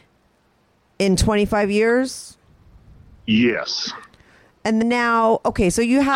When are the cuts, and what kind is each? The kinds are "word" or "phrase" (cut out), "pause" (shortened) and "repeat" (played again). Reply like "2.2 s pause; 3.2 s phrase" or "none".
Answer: 4.8 s word